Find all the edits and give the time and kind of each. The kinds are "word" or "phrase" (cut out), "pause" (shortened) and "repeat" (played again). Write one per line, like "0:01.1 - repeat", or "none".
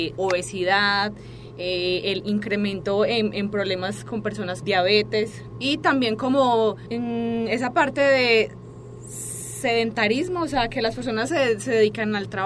none